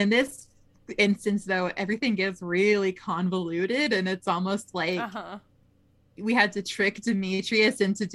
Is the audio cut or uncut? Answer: uncut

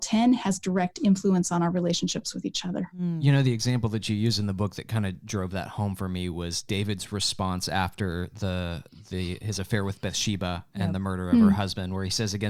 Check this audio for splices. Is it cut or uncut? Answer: uncut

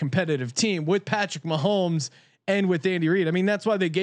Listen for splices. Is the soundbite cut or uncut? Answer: uncut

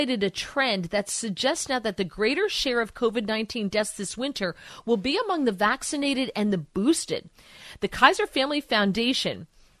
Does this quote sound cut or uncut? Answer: uncut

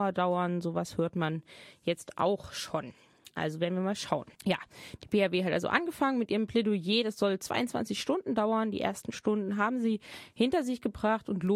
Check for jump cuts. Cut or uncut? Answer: cut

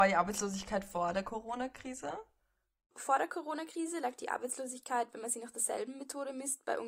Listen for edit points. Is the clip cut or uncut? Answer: uncut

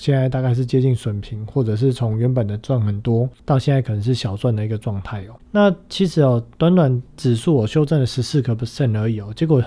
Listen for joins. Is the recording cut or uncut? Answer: cut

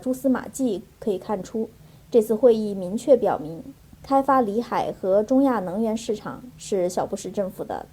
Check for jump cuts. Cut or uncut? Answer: uncut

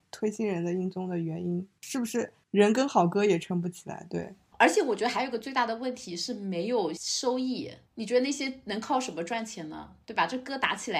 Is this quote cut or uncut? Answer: cut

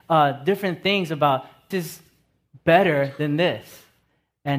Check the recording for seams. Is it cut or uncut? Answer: cut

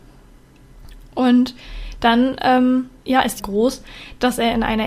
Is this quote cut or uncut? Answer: cut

